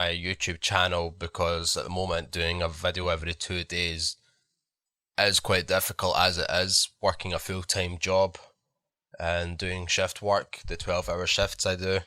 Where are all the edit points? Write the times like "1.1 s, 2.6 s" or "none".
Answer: none